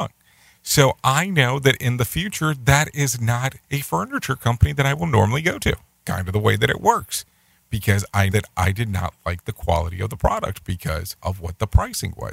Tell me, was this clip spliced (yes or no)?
yes